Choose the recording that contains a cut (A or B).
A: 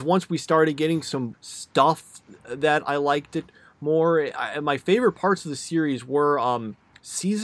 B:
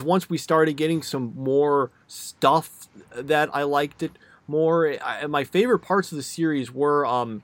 A